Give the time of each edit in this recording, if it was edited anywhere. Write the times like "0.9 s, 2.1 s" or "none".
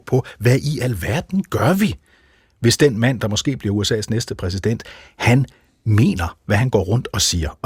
none